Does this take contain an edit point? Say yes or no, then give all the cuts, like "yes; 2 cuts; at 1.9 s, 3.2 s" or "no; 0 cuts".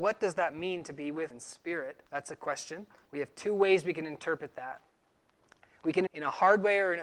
yes; 4 cuts; at 1.3 s, 2.1 s, 3.1 s, 6.1 s